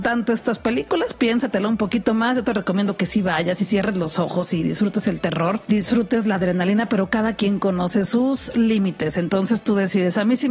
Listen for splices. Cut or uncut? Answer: cut